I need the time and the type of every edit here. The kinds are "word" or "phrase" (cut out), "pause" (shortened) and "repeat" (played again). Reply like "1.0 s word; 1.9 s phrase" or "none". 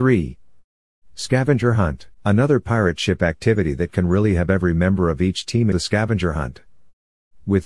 2.1 s pause; 5.7 s phrase